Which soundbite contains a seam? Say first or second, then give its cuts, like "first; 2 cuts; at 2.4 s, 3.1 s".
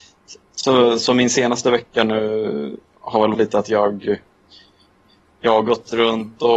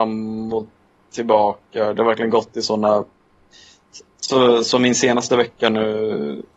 first; 1 cut; at 3.3 s